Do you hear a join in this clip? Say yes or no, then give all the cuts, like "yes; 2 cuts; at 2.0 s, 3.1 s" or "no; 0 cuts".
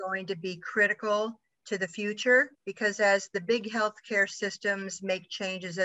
yes; 1 cut; at 2.5 s